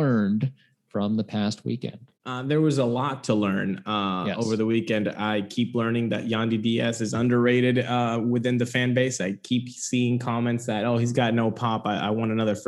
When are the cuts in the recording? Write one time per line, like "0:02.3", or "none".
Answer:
0:02.2